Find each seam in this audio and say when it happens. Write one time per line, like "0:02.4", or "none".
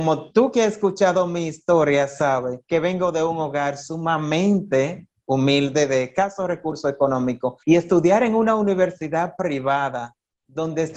0:02.6
0:07.6